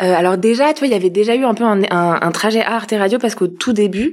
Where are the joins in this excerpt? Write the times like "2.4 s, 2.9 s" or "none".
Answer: none